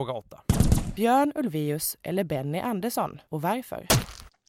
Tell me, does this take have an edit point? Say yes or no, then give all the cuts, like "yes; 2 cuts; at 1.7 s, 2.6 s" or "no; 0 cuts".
no; 0 cuts